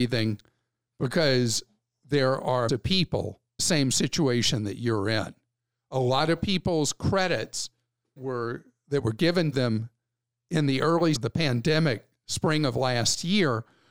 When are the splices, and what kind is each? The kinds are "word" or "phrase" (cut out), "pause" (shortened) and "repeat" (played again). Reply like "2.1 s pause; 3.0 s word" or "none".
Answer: 2.7 s word; 3.6 s phrase; 8.2 s word; 9.5 s word; 11.1 s word